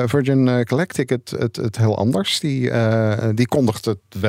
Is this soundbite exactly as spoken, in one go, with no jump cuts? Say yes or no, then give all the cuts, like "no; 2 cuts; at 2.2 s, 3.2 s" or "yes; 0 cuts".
yes; 0 cuts